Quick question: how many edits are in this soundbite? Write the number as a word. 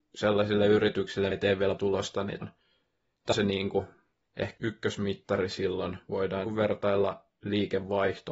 six